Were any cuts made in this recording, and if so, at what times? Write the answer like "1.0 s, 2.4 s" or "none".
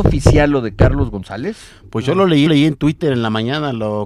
2.5 s